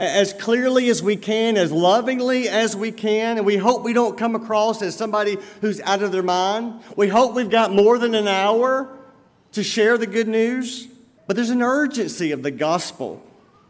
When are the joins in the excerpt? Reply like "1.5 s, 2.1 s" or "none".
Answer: 11.2 s